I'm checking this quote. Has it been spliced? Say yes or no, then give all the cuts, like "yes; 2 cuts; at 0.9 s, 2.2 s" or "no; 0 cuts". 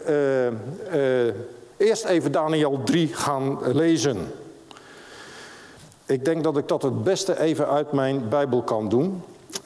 yes; 1 cut; at 5.8 s